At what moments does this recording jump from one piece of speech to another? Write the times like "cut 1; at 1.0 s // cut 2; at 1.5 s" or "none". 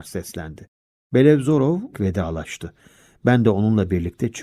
cut 1; at 1.9 s